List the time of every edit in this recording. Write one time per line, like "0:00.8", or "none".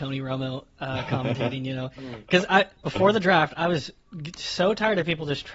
0:02.7

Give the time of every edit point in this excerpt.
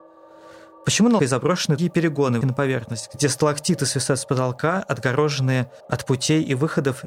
0:01.2
0:01.8
0:02.4
0:05.8

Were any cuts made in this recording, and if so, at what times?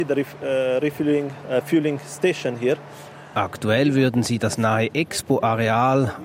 none

